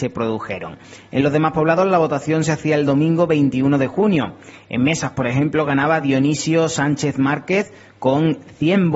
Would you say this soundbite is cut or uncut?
uncut